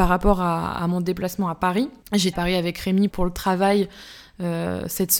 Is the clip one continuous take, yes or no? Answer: no